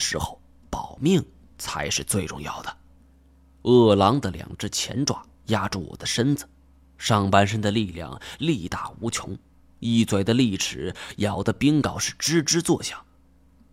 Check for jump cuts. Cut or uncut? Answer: cut